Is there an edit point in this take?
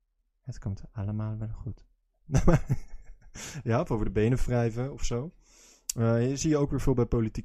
no; 0 cuts

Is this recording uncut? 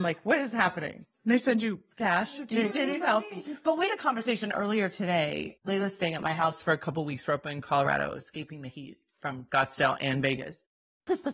no; 4 cuts; at 1.1 s, 2.7 s, 3.9 s, 9.5 s

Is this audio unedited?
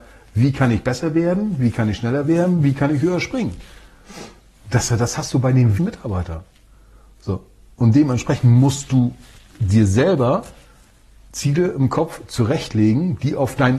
no; 1 cut; at 5.8 s

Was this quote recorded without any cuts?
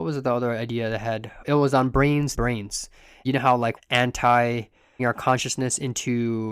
no; 5 cuts; at 1.4 s, 2.4 s, 3.2 s, 3.8 s, 5.0 s

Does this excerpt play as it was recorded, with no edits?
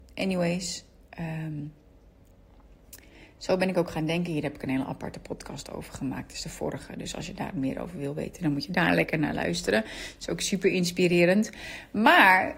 yes; 0 cuts

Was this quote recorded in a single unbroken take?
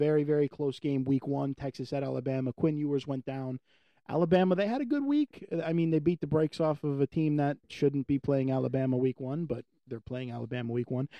yes; 0 cuts

